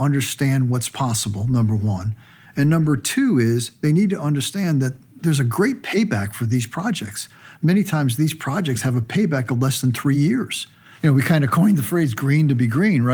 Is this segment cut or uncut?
uncut